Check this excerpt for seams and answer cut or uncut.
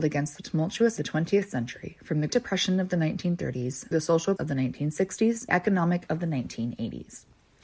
cut